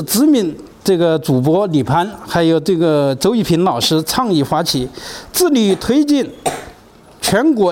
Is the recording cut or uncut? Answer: uncut